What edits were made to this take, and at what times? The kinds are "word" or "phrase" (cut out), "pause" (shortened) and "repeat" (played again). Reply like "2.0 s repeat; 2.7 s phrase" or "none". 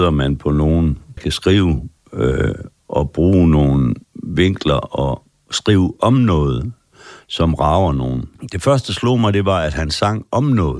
1.2 s word; 4.0 s pause